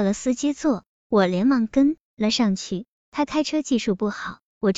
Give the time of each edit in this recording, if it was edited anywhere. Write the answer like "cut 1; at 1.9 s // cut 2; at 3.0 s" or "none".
cut 1; at 2.0 s